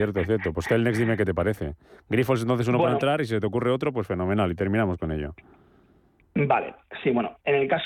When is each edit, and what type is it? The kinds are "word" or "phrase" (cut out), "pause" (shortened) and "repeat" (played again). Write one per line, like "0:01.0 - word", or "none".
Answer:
none